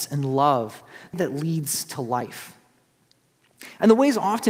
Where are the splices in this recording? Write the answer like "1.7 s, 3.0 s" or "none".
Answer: 1.1 s